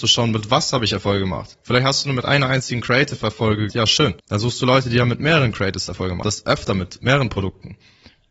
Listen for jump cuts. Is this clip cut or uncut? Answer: cut